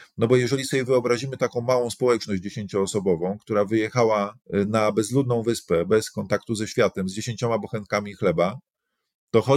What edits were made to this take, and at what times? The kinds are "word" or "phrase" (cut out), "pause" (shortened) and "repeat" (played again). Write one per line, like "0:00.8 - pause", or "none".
0:04.4 - pause